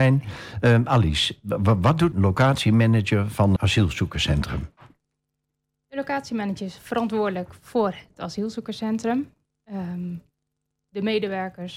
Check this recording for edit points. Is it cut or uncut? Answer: cut